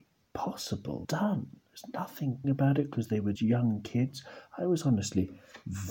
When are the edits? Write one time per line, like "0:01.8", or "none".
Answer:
0:01.0
0:02.4
0:03.4